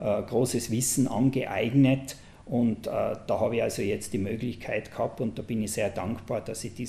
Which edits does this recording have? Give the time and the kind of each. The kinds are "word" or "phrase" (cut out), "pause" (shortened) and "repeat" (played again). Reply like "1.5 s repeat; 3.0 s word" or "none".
none